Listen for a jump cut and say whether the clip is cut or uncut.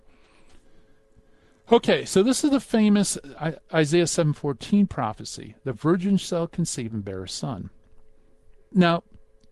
uncut